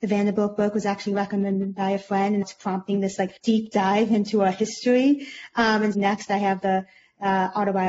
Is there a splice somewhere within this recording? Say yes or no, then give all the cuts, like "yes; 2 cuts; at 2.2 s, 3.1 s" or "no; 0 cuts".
yes; 3 cuts; at 2.4 s, 3.4 s, 5.9 s